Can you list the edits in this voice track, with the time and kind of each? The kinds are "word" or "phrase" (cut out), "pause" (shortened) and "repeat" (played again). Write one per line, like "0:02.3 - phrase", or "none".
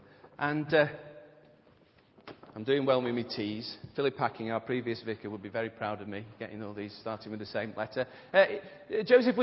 none